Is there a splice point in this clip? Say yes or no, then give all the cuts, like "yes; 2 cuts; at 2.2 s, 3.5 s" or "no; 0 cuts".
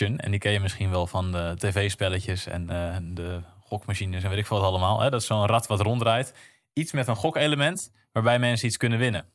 no; 0 cuts